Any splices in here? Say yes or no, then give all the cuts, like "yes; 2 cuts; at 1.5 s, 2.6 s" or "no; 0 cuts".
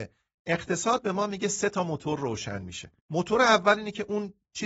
yes; 1 cut; at 3.0 s